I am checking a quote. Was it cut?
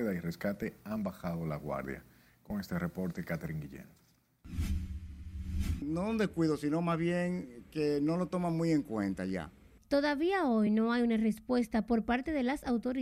no; 0 cuts

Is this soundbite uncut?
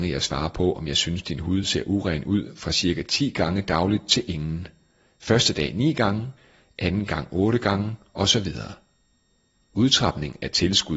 yes; 0 cuts

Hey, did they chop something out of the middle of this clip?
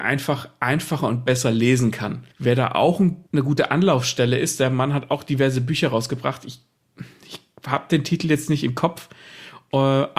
yes; 2 cuts; at 2.3 s, 3.3 s

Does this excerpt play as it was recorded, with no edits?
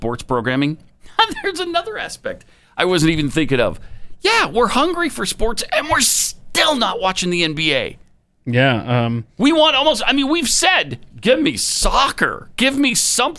yes; 0 cuts

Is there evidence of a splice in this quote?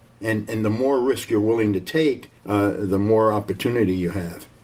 yes; 1 cut; at 2.4 s

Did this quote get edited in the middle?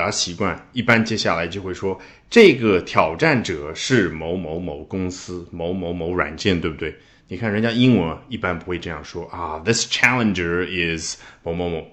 no; 0 cuts

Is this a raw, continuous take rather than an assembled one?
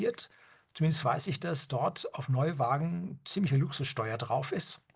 no; 2 cuts; at 1.0 s, 1.7 s

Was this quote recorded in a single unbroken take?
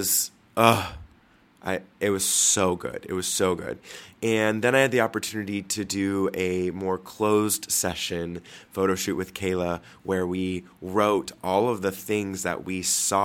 yes; 0 cuts

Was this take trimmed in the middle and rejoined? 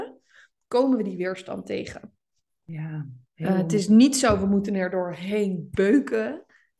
no; 0 cuts

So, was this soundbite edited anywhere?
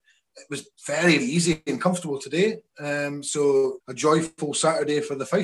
yes; 2 cuts; at 1.2 s, 3.8 s

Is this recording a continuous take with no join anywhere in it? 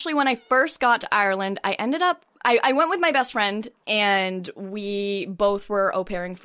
no; 1 cut; at 2.3 s

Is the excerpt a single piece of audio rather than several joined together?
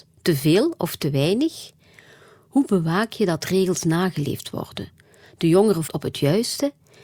no; 1 cut; at 5.9 s

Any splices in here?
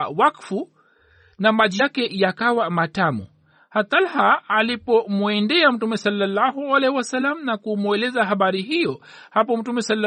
no; 0 cuts

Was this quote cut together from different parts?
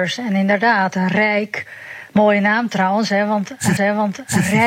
yes; 1 cut; at 3.8 s

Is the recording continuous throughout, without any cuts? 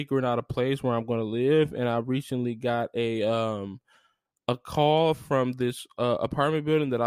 yes; 0 cuts

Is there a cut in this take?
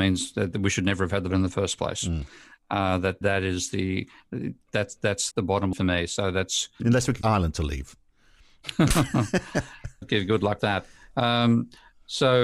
yes; 8 cuts; at 1.3 s, 3.2 s, 5.3 s, 5.7 s, 6.8 s, 7.2 s, 10.0 s, 10.6 s

